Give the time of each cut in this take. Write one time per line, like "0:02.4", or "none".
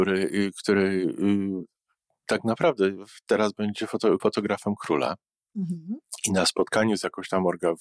0:04.2